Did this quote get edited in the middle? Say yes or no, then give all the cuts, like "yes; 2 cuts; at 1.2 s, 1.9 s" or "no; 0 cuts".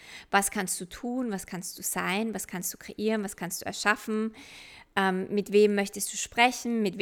no; 0 cuts